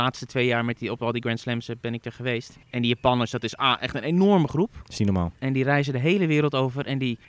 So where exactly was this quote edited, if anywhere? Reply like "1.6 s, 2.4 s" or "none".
2.6 s